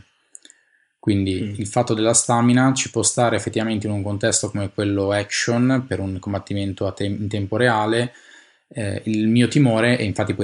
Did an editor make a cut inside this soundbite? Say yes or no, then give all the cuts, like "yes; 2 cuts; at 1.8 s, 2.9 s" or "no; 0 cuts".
no; 0 cuts